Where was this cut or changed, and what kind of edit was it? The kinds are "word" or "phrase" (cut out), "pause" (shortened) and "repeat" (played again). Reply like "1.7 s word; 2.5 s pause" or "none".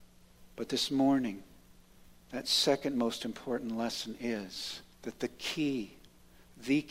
4.9 s pause

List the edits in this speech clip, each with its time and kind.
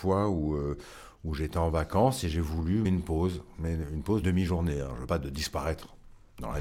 2.8 s word; 4.2 s word; 5.1 s word

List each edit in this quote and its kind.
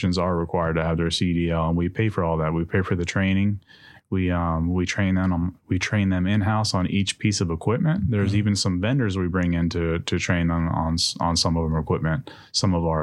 none

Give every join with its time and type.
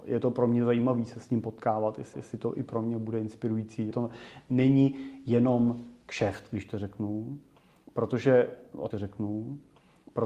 2.1 s repeat; 3.9 s word; 8.9 s repeat

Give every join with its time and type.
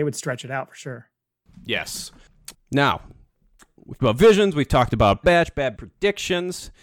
2.5 s word; 4.0 s word; 5.2 s word; 5.8 s word

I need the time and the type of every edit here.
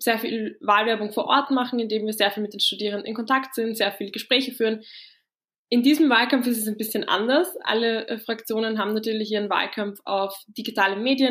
none

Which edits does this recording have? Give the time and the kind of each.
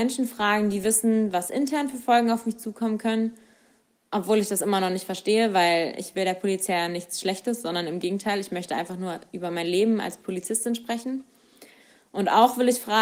none

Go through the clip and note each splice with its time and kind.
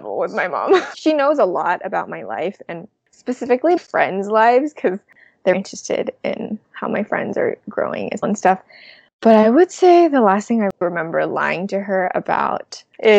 0.9 s word; 3.8 s word; 5.5 s word; 6.6 s word; 8.2 s word; 10.8 s word

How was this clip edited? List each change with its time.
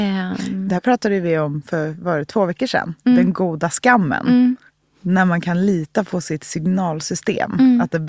4.7 s pause

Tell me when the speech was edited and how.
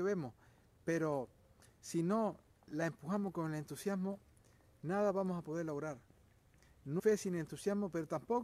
7.0 s word

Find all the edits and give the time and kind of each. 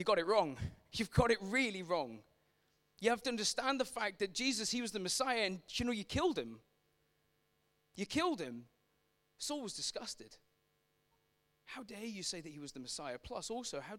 none

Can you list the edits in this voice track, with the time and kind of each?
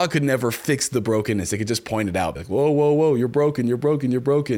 2.4 s word

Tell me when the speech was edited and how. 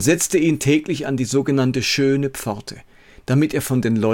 none

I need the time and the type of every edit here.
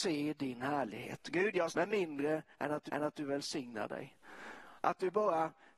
1.7 s phrase; 2.9 s repeat

